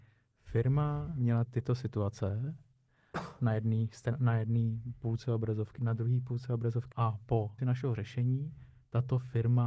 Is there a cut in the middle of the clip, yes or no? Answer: yes